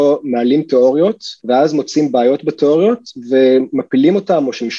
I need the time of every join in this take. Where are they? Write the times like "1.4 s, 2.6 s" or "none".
1.4 s